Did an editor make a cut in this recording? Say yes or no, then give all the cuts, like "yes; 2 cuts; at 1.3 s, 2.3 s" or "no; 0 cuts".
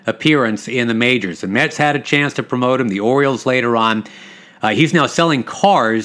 no; 0 cuts